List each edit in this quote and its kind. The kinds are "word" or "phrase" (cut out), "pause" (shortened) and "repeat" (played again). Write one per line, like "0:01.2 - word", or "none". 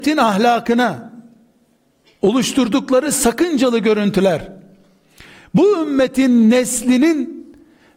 none